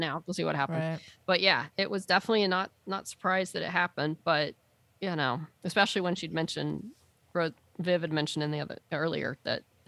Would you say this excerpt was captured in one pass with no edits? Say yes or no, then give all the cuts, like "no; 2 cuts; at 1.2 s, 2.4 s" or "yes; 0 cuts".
yes; 0 cuts